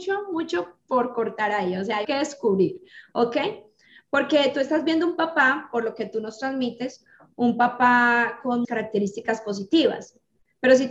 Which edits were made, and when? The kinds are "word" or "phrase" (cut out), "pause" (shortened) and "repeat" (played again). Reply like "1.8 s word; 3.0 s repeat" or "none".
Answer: 2.0 s word; 8.6 s word